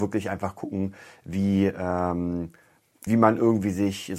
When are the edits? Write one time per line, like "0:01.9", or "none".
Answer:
0:03.1